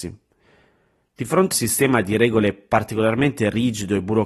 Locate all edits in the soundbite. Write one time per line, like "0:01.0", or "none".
0:01.5